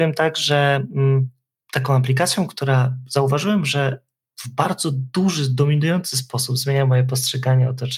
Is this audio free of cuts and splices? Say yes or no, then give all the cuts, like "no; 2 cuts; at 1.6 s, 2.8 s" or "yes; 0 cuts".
yes; 0 cuts